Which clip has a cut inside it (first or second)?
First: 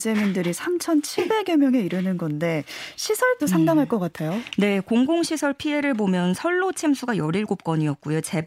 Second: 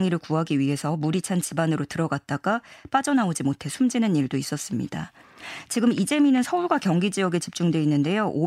first